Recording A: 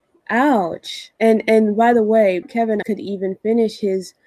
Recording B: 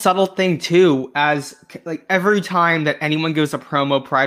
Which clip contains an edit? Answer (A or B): A